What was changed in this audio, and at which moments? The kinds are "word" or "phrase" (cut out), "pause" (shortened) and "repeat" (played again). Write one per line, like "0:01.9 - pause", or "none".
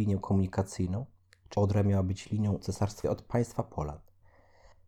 0:01.5 - word
0:02.6 - word
0:03.0 - word